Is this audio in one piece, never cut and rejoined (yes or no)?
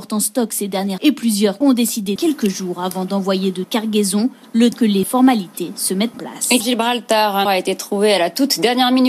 no